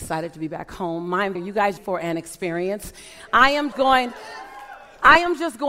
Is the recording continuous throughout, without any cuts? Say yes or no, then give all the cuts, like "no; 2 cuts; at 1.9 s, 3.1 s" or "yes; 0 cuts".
no; 3 cuts; at 1.3 s, 1.8 s, 3.7 s